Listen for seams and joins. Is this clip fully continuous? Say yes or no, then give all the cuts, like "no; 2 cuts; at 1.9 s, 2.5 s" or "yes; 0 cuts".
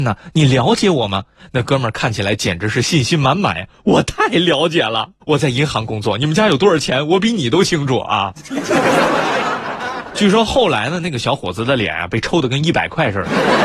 no; 1 cut; at 5.2 s